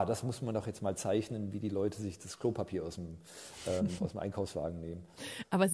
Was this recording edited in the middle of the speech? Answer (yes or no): no